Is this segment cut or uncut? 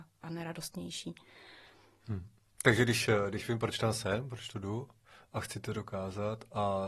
uncut